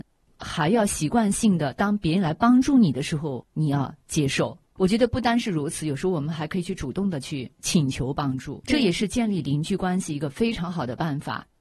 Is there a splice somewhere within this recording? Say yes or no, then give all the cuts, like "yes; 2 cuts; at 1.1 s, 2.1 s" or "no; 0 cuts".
yes; 4 cuts; at 3.5 s, 4.7 s, 7.5 s, 8.6 s